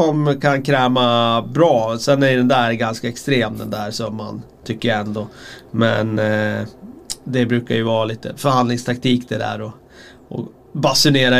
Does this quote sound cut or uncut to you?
uncut